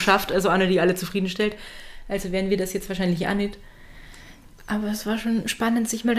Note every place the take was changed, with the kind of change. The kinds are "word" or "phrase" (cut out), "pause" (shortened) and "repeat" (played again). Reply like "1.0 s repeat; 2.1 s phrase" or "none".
none